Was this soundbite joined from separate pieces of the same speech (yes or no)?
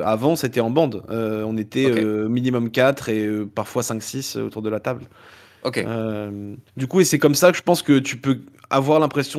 yes